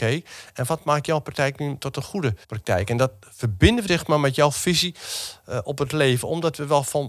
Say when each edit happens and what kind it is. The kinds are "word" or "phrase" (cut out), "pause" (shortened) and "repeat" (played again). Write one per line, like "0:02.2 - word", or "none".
0:02.4 - pause
0:03.9 - word